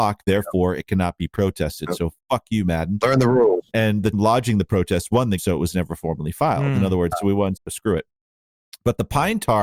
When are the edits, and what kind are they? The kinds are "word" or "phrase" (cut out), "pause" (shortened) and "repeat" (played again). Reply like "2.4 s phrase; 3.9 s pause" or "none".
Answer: 4.1 s word; 5.4 s word; 7.1 s phrase; 7.6 s word